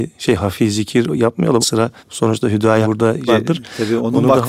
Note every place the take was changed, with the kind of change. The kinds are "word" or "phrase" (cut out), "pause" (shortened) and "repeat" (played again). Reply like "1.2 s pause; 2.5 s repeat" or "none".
1.6 s word; 2.0 s pause; 2.8 s word; 3.3 s word